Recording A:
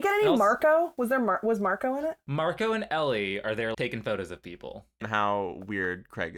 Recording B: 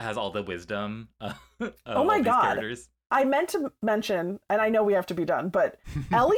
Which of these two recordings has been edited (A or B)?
A